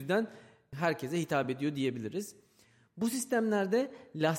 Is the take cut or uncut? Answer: uncut